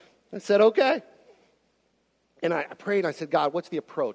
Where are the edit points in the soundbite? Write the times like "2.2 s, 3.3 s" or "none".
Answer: none